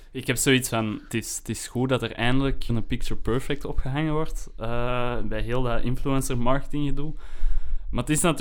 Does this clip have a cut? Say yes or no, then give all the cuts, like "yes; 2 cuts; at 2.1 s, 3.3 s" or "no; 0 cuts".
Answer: yes; 1 cut; at 2.7 s